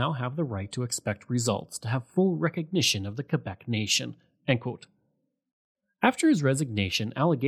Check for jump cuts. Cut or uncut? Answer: uncut